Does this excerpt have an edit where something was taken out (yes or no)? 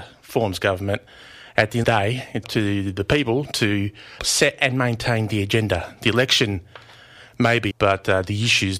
yes